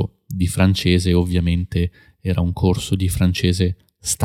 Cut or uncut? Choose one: uncut